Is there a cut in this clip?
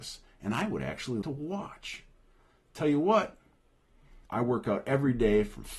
yes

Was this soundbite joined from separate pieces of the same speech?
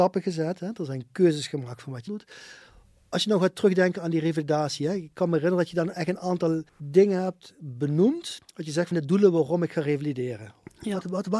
yes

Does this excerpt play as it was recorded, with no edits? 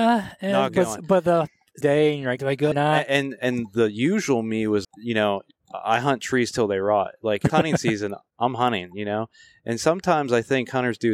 no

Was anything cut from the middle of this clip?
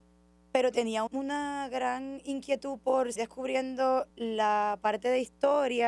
yes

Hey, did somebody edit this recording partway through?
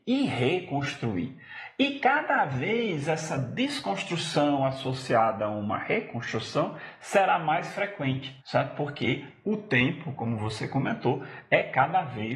yes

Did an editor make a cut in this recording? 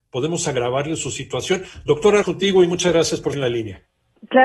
yes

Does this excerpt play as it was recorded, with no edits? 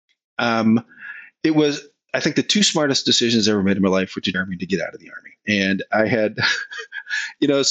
no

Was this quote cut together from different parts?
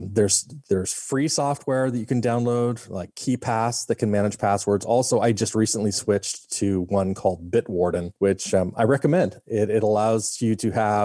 yes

